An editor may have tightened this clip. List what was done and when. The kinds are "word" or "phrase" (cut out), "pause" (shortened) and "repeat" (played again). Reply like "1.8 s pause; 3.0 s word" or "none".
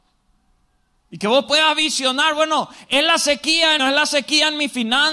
3.8 s phrase